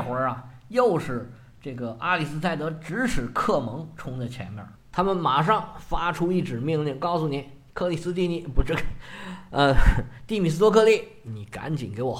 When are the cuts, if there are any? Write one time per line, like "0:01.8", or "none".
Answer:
none